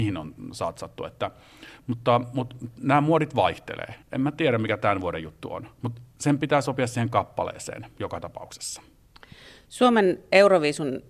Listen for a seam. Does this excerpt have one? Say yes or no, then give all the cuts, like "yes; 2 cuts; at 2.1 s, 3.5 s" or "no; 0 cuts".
no; 0 cuts